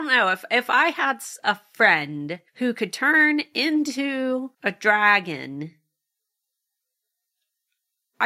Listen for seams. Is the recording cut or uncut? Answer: cut